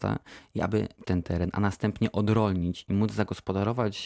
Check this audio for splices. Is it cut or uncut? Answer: cut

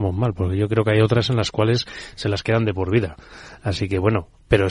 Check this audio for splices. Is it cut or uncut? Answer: uncut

